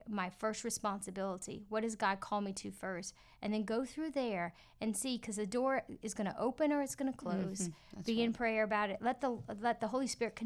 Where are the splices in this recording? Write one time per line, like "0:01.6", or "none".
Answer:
none